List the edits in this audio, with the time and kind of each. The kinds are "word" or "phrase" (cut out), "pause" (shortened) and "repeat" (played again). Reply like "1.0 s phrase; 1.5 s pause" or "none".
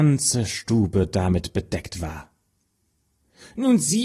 none